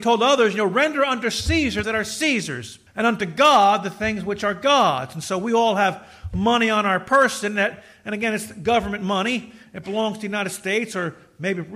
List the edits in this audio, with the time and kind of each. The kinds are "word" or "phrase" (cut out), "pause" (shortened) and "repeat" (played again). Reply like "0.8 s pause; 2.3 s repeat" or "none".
1.8 s phrase; 2.9 s pause